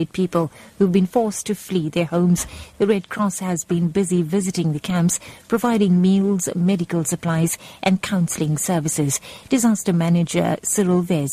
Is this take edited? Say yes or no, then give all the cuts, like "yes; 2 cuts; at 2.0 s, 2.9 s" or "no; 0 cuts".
no; 0 cuts